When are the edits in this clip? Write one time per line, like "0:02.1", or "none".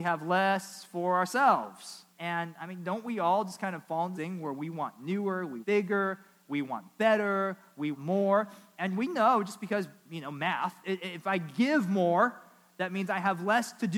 0:02.1
0:04.1
0:05.6
0:07.9